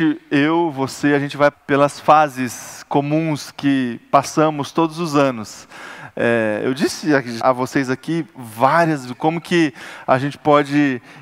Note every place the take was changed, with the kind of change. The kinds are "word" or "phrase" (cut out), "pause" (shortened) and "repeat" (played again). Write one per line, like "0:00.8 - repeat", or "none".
0:01.5 - word
0:07.4 - word
0:09.1 - word